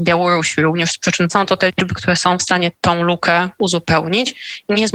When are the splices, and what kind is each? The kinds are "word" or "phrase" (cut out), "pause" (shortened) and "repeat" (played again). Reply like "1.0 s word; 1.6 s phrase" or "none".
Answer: 1.3 s phrase; 2.7 s pause